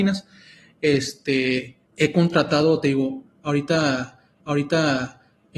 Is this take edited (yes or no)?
yes